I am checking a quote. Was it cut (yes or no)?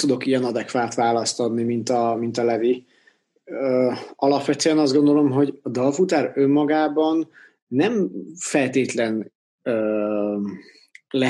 no